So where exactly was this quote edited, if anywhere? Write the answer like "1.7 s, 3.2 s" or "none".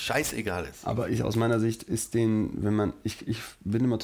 none